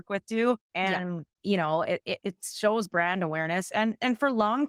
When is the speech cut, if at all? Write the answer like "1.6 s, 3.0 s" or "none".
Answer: none